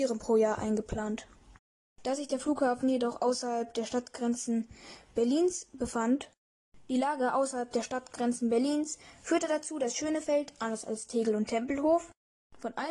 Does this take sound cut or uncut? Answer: uncut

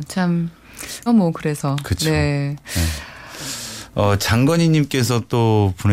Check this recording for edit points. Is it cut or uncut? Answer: cut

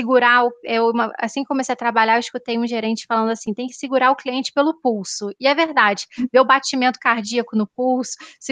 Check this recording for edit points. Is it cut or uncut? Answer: uncut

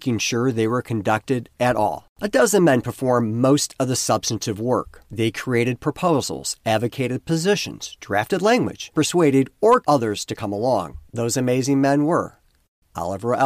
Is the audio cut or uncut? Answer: cut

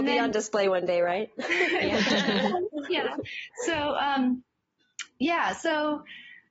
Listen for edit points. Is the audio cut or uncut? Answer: uncut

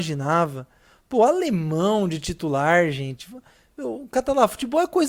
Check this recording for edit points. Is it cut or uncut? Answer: uncut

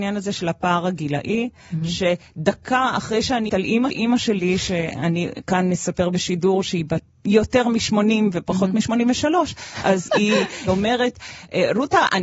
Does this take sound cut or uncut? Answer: cut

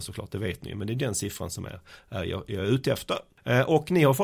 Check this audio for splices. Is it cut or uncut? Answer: uncut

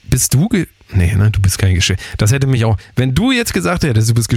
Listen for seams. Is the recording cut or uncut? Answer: uncut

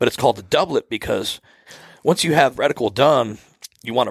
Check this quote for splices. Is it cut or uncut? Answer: cut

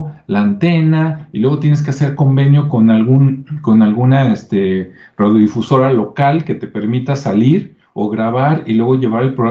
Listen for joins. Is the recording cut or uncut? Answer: uncut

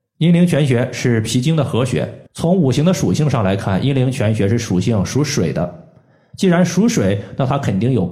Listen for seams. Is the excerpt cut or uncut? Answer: cut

